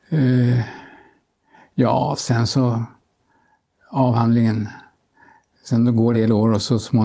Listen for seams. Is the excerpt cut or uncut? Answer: cut